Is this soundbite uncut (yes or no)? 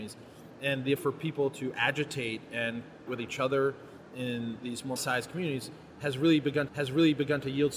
no